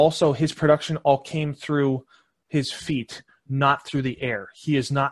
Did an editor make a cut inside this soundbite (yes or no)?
no